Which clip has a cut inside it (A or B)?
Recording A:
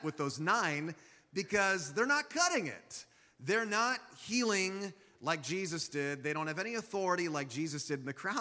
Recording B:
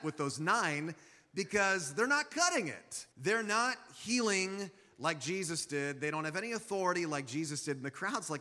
B